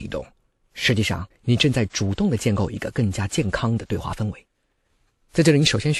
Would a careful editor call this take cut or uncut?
cut